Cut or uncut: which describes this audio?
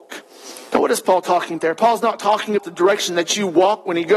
cut